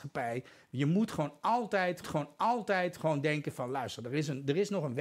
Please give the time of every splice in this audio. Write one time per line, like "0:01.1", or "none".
0:02.0